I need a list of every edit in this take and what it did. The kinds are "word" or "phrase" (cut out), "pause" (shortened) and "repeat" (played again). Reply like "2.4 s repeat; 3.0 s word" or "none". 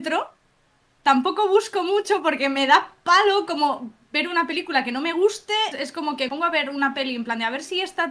5.7 s word; 6.3 s word

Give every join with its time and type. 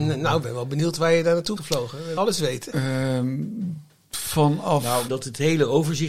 1.6 s word; 2.2 s word; 5.1 s word

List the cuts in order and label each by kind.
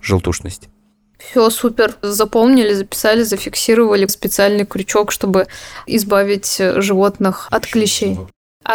4.1 s phrase

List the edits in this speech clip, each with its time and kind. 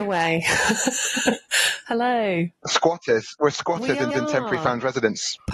4.1 s repeat

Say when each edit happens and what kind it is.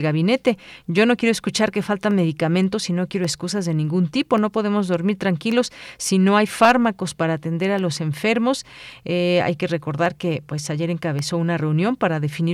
none

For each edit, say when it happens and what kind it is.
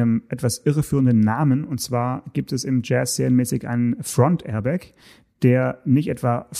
none

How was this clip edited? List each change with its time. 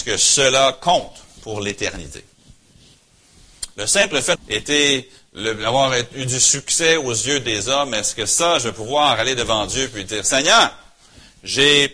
4.4 s word

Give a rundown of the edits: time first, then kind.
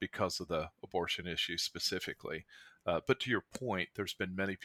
none

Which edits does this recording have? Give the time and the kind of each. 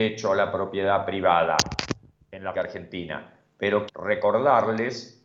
2.5 s word; 3.9 s word

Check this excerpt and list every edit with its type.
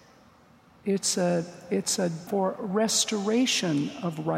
2.3 s word

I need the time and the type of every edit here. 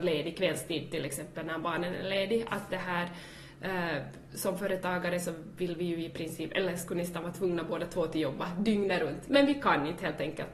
none

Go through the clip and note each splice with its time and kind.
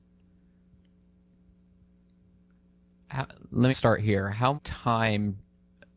3.7 s word; 4.6 s word

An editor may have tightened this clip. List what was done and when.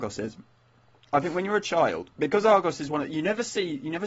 none

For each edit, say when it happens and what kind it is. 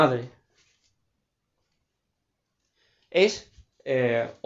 none

